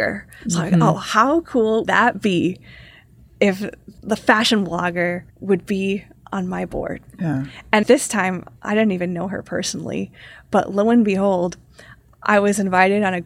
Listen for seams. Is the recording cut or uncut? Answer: cut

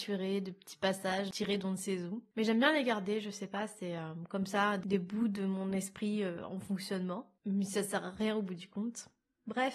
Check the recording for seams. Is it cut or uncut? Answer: uncut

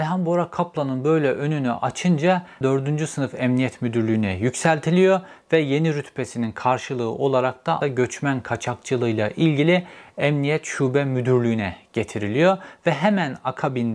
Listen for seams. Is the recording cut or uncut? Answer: cut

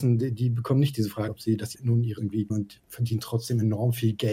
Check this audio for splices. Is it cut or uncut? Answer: cut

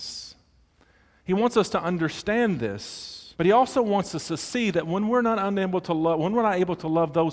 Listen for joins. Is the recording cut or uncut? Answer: cut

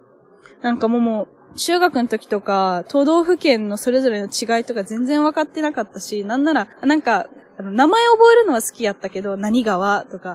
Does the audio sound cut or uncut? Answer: cut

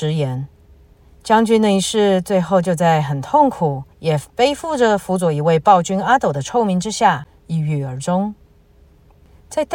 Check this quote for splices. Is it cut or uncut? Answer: cut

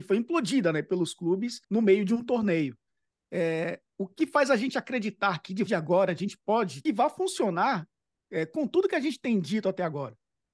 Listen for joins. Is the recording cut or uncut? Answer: cut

